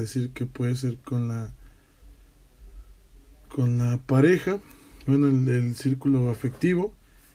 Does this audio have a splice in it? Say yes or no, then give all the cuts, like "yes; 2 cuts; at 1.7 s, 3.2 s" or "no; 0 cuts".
no; 0 cuts